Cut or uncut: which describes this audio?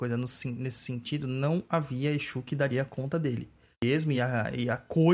uncut